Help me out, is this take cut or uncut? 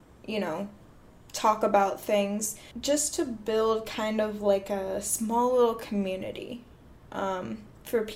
uncut